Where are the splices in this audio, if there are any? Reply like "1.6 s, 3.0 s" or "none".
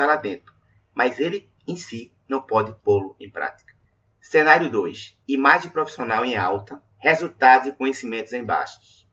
1.6 s, 3.8 s, 5.2 s, 6.9 s